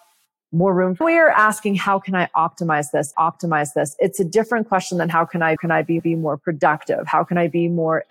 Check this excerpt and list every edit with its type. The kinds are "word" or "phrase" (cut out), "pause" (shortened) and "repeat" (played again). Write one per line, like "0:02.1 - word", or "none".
0:01.0 - phrase
0:03.1 - repeat
0:05.6 - phrase
0:06.0 - repeat